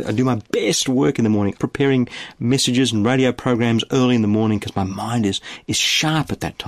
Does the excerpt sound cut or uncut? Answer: cut